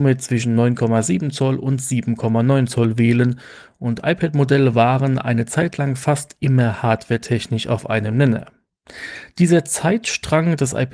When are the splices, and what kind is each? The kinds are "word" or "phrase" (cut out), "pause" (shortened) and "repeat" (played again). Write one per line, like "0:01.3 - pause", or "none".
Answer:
none